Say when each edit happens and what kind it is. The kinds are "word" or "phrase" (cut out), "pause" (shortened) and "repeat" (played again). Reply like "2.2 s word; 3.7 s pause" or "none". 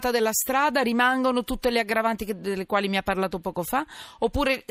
none